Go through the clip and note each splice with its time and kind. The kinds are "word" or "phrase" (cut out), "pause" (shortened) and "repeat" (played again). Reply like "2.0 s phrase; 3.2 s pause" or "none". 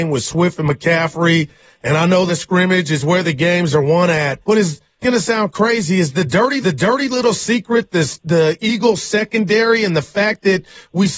2.3 s word; 4.4 s pause; 5.0 s word; 6.6 s repeat